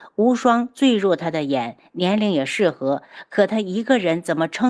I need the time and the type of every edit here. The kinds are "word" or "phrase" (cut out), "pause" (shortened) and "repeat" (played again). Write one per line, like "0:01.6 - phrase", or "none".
none